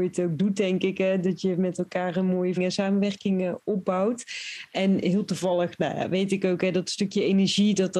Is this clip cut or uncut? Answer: cut